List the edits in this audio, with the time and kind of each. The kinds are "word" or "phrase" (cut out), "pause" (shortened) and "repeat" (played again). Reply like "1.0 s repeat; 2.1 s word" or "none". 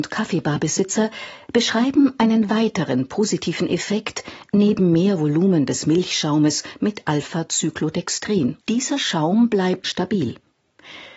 8.6 s pause; 9.8 s word